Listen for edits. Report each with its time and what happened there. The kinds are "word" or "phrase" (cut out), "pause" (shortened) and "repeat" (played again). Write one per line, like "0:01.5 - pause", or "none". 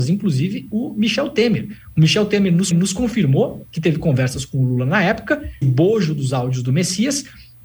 0:02.7 - repeat
0:05.6 - word